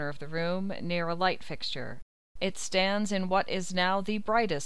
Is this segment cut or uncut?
uncut